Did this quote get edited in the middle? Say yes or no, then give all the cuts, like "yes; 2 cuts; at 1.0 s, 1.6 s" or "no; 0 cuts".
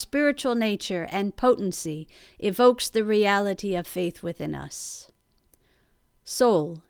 no; 0 cuts